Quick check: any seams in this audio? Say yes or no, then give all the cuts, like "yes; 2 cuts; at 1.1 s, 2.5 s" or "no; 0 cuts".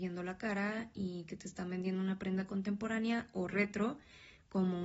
no; 0 cuts